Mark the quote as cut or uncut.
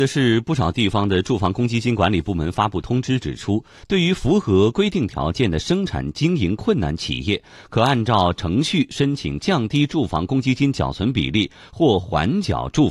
uncut